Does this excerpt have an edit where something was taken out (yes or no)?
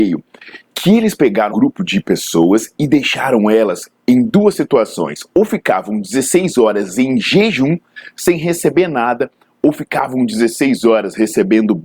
yes